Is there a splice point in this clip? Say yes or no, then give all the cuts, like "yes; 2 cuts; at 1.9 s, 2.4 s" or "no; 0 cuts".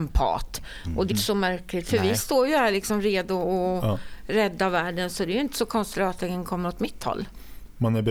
yes; 2 cuts; at 1.1 s, 5.9 s